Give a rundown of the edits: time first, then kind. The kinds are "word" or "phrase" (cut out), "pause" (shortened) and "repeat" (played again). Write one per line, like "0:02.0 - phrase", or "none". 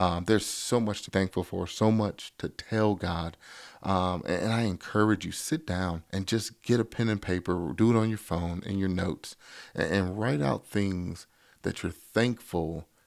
0:01.1 - word
0:06.1 - pause

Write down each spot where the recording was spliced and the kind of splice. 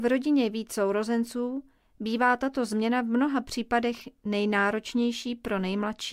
none

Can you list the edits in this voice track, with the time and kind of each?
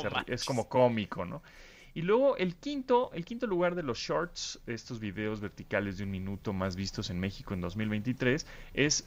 none

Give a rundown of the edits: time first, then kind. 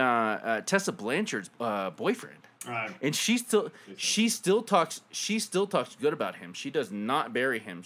0:01.5 - pause

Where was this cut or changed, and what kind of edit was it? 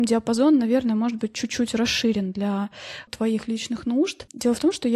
none

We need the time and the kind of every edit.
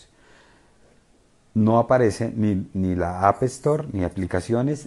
none

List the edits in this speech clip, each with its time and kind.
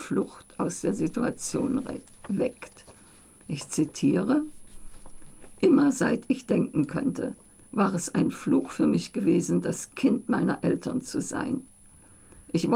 none

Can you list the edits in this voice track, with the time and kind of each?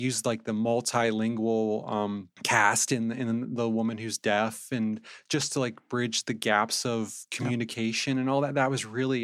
0:02.4 - pause

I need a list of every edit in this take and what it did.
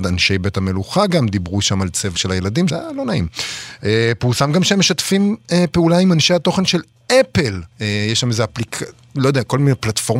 0:02.2 - word
0:02.7 - word
0:07.7 - pause

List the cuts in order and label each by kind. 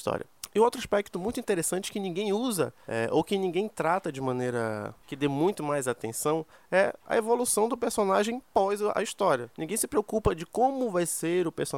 none

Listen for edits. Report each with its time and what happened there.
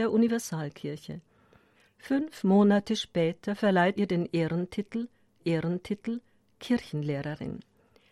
0:01.8 - pause
0:04.0 - word
0:05.4 - repeat

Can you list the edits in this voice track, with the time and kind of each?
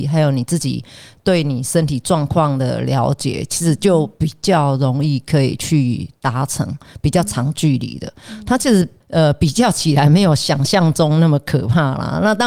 none

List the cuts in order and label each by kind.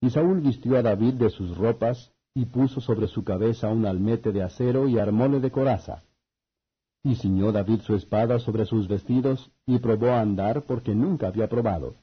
none

